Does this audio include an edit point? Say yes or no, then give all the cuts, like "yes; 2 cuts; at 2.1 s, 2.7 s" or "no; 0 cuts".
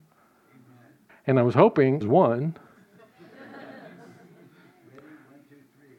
yes; 2 cuts; at 1.1 s, 2.0 s